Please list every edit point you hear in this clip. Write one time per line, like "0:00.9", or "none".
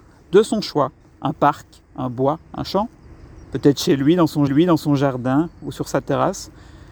0:01.0
0:01.8
0:02.5
0:03.4
0:04.5